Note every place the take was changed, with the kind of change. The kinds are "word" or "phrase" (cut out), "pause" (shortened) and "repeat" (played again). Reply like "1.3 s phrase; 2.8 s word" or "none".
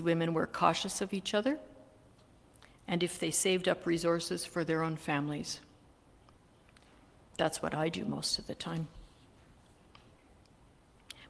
none